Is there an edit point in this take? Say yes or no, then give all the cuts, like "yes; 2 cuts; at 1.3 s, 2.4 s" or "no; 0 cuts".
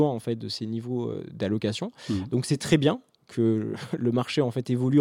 no; 0 cuts